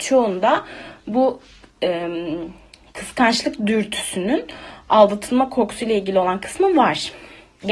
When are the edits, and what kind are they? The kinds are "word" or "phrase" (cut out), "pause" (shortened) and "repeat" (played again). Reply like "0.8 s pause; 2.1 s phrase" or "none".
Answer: none